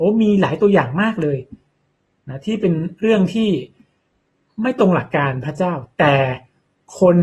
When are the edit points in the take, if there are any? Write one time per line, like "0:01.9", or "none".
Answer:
none